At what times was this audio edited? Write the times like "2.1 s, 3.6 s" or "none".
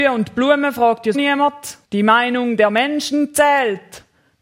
1.1 s, 1.8 s